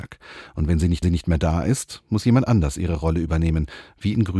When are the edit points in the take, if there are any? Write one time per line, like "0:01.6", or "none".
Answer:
0:01.0